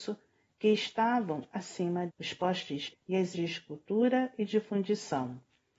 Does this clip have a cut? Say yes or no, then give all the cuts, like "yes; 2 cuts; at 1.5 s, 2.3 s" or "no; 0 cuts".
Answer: yes; 3 cuts; at 2.1 s, 2.9 s, 3.3 s